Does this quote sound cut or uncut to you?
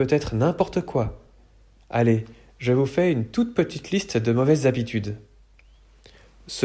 uncut